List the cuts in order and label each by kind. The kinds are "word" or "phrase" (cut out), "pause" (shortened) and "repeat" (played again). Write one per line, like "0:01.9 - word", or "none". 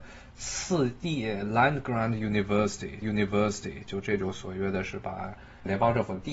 0:03.0 - repeat